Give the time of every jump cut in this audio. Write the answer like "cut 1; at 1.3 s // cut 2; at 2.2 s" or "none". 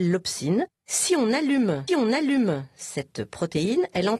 cut 1; at 1.9 s